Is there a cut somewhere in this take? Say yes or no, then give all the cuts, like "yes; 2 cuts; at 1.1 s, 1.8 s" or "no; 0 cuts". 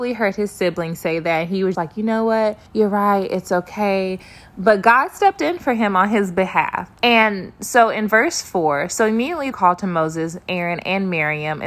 yes; 4 cuts; at 1.7 s, 2.7 s, 6.9 s, 9.5 s